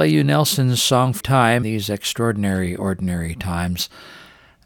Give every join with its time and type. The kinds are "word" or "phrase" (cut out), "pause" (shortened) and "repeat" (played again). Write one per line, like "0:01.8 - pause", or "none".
0:01.2 - word
0:01.6 - word